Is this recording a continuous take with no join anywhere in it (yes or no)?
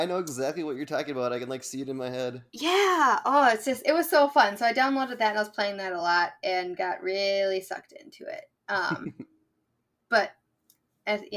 yes